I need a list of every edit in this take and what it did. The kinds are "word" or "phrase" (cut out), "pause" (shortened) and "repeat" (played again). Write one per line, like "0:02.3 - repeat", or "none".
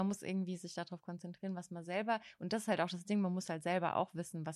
none

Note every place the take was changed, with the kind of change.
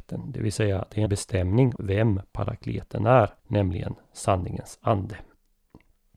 0:01.1 - word
0:01.8 - word
0:03.4 - pause

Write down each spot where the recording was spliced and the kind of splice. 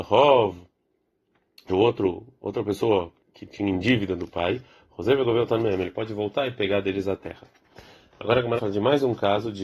0:01.7 - word
0:03.2 - word
0:08.6 - word

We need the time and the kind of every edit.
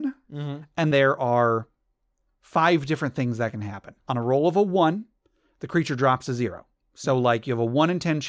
0:00.9 - word
0:04.0 - pause

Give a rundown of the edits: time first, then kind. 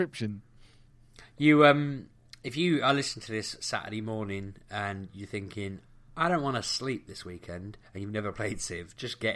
none

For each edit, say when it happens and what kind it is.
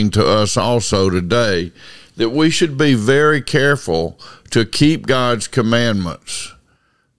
none

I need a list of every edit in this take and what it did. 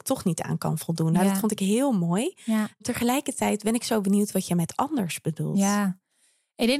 none

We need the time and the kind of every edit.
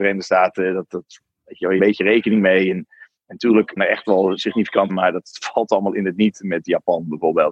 0:01.8 - phrase
0:03.8 - word
0:04.9 - word

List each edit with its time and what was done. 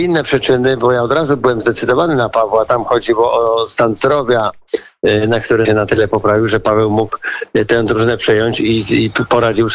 0:05.6 - phrase

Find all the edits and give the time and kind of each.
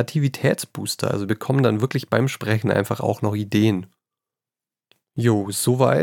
none

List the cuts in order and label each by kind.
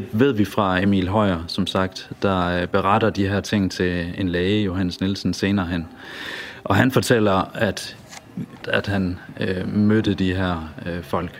0:08.6 - phrase

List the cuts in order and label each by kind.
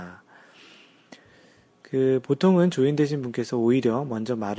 none

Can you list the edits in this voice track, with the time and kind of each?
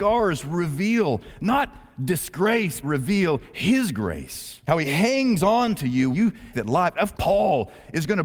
0:02.8 - phrase
0:04.6 - pause
0:06.1 - word
0:06.5 - word
0:07.1 - word

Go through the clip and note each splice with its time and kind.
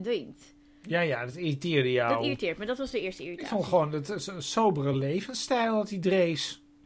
none

